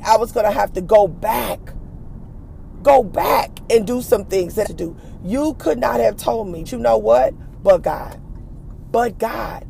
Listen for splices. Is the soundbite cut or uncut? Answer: cut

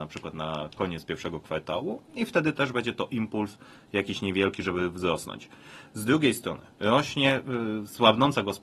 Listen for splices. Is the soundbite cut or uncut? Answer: uncut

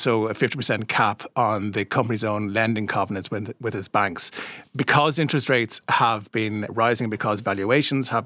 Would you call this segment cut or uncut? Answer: uncut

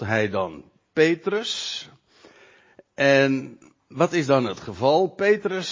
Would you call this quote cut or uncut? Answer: uncut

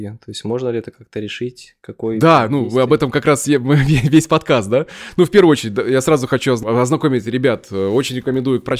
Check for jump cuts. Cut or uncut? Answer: uncut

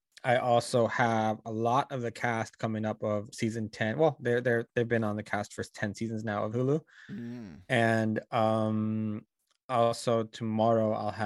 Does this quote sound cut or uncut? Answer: cut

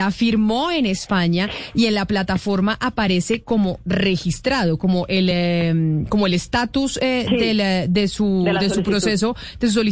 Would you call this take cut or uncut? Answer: uncut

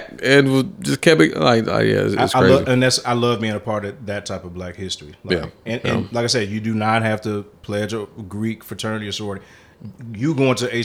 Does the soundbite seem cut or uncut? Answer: uncut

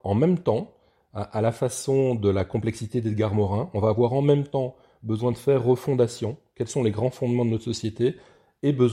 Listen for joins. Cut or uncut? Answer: uncut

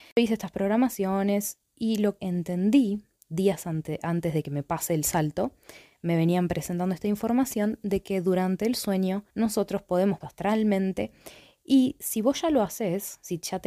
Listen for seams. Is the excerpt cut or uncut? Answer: cut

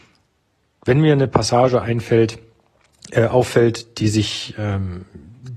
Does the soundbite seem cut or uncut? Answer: uncut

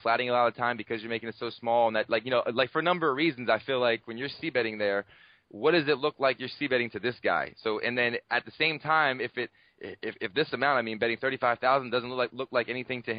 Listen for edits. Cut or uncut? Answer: uncut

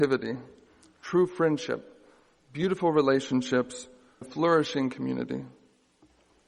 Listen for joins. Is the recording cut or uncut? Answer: cut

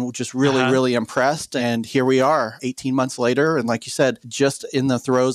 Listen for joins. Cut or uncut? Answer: uncut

